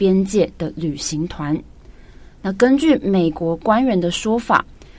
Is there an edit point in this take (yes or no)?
no